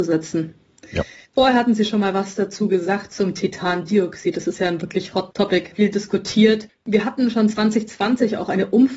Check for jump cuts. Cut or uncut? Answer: uncut